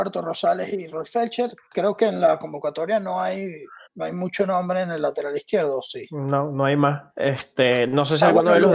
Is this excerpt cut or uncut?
cut